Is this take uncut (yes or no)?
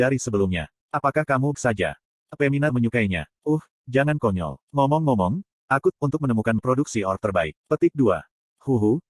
no